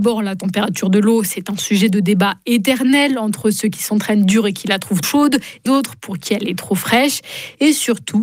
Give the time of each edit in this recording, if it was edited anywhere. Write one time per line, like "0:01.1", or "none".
0:05.0
0:05.7